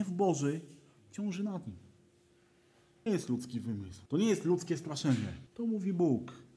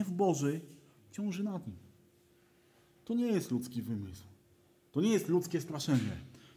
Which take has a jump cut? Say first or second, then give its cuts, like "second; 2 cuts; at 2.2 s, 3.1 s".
first; 3 cuts; at 3.1 s, 4.1 s, 5.5 s